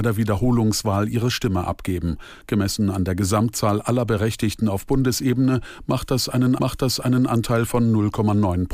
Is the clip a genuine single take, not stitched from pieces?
no; 1 cut; at 6.6 s

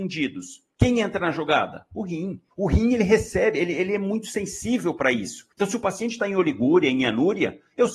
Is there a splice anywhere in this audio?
yes; 2 cuts; at 2.5 s, 5.5 s

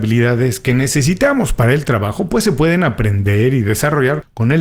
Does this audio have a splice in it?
no; 0 cuts

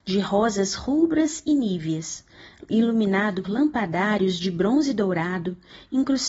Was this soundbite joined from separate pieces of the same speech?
yes; 1 cut; at 3.4 s

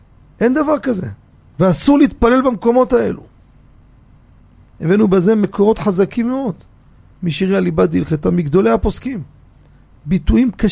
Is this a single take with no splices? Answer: yes; 0 cuts

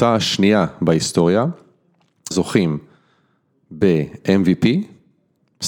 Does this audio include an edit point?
yes; 1 cut; at 2.3 s

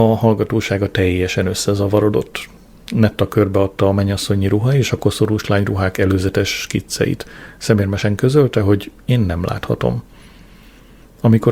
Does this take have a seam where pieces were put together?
no; 0 cuts

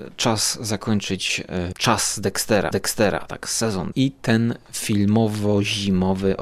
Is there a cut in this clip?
yes; 3 cuts; at 1.7 s, 2.7 s, 3.9 s

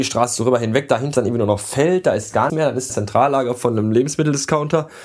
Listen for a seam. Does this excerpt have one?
yes; 3 cuts; at 1.1 s, 2.5 s, 2.9 s

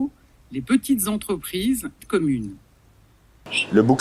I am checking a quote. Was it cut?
yes; 1 cut; at 2.0 s

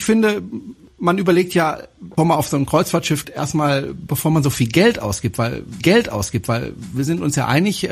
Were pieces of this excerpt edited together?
yes; 3 cuts; at 2.2 s, 3.2 s, 5.8 s

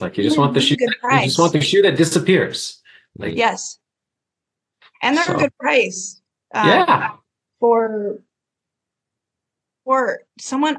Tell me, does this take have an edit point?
no; 0 cuts

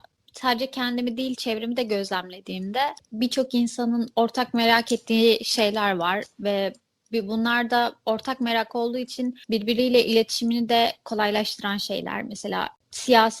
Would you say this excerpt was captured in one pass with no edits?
no; 1 cut; at 9.4 s

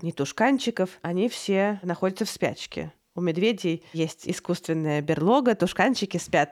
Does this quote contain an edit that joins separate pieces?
no; 0 cuts

